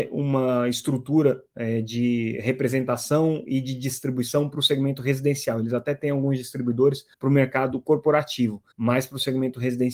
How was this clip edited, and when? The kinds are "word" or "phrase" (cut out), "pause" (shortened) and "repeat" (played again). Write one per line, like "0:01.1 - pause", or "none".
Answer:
0:07.1 - pause
0:08.7 - pause